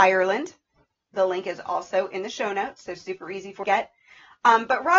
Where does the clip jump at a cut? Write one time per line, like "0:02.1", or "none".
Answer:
0:03.6